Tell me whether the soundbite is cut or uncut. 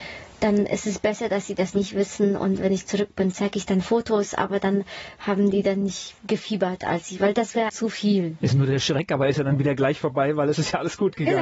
cut